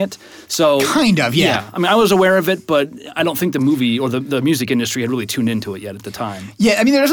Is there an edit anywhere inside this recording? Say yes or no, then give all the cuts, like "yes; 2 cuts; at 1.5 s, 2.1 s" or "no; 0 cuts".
no; 0 cuts